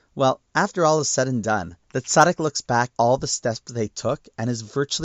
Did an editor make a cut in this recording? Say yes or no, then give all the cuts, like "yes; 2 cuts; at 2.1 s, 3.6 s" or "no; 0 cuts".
yes; 2 cuts; at 1.8 s, 2.9 s